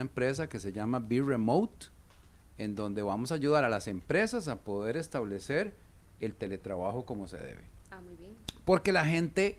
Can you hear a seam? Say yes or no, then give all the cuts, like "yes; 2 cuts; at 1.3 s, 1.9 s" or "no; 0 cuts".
no; 0 cuts